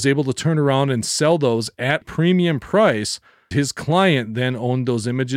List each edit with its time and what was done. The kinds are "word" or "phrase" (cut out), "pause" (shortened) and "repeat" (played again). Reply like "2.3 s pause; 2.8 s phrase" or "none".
2.0 s word; 3.5 s word